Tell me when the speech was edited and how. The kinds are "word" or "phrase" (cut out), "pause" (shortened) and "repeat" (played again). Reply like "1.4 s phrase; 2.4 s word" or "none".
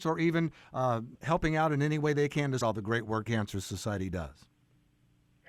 1.1 s pause; 2.6 s word; 3.3 s phrase